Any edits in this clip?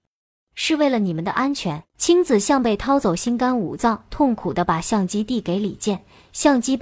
yes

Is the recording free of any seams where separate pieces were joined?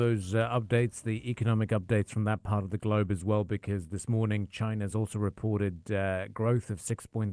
yes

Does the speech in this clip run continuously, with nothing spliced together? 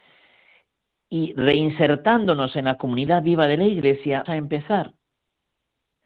no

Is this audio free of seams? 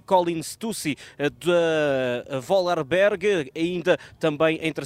yes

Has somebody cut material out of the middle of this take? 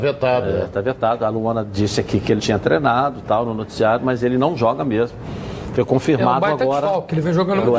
yes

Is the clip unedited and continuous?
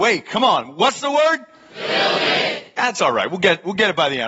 yes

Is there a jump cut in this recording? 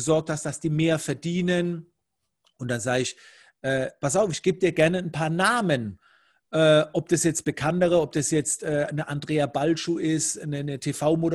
no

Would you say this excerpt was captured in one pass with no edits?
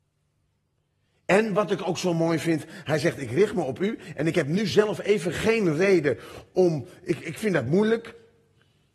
yes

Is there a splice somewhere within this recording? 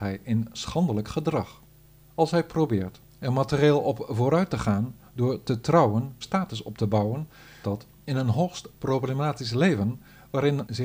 yes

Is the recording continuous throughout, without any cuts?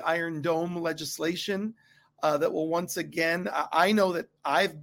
yes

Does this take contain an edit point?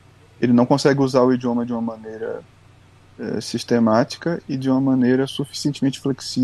no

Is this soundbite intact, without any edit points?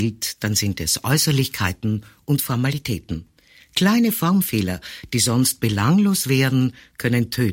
yes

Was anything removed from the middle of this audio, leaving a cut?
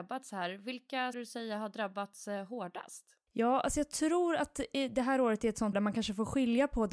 yes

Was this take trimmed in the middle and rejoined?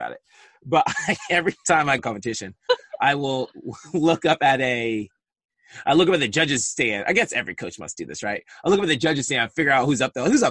yes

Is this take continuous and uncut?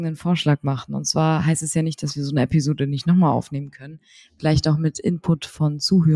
yes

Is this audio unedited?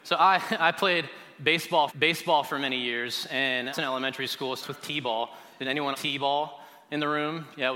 no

